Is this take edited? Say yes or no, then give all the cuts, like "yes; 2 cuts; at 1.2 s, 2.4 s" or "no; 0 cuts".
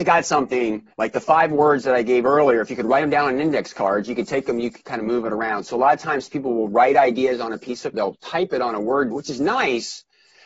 yes; 3 cuts; at 0.9 s, 7.9 s, 9.1 s